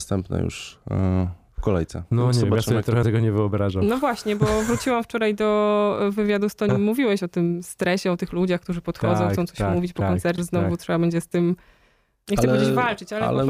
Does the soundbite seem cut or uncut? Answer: cut